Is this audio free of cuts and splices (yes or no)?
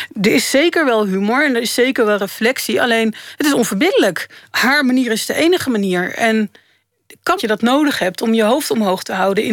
no